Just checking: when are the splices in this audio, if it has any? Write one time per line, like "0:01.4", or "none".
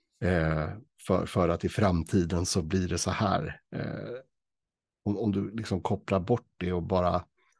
none